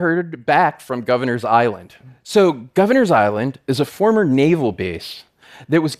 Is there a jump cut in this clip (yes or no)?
no